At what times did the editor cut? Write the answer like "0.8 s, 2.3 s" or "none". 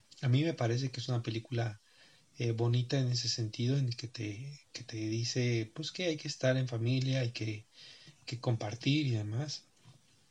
none